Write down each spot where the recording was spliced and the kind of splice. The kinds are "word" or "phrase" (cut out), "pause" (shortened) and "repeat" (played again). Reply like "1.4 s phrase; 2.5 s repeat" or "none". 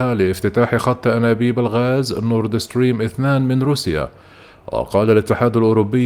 none